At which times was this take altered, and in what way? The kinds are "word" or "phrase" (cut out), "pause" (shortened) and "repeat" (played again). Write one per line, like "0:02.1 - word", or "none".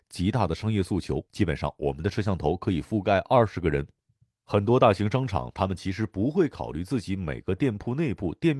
0:01.3 - pause